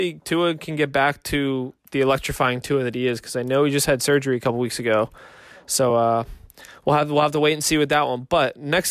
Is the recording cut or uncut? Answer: uncut